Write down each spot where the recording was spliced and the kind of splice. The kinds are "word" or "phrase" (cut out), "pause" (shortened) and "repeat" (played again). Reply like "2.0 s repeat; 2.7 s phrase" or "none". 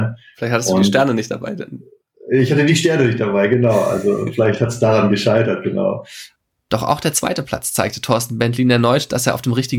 none